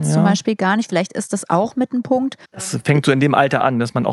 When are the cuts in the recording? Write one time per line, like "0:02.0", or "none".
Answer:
0:02.5